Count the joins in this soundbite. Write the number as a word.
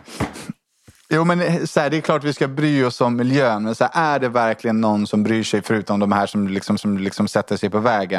one